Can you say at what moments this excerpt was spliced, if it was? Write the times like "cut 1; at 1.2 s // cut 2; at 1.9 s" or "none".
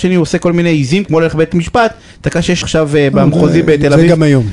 cut 1; at 1.1 s // cut 2; at 2.6 s